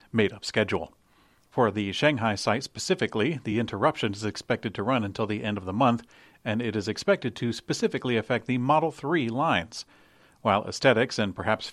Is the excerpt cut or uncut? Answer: uncut